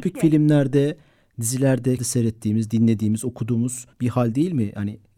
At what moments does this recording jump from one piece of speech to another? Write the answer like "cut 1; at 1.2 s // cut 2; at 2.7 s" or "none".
cut 1; at 2.0 s // cut 2; at 3.9 s